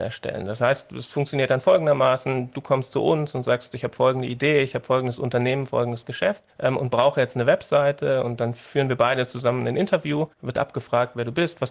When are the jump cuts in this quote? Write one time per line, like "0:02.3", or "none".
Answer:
0:06.5
0:10.3